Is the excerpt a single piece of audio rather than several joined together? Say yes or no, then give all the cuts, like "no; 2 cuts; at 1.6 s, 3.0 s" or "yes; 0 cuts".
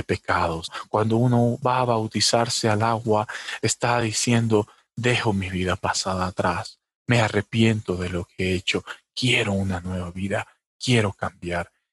yes; 0 cuts